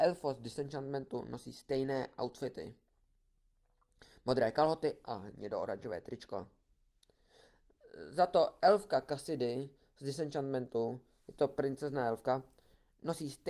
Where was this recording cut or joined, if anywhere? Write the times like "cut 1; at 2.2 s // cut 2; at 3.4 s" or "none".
none